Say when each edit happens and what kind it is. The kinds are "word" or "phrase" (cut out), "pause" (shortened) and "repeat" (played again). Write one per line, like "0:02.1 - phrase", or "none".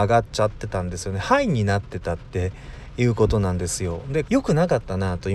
0:04.3 - phrase